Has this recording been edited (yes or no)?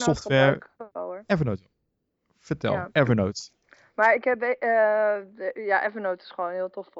no